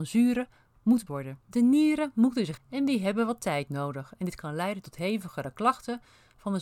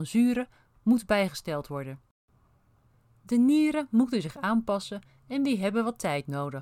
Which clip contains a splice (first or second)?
first